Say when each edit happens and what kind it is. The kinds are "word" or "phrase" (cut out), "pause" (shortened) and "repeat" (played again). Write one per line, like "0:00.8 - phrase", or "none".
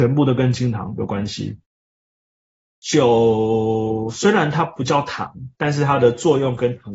none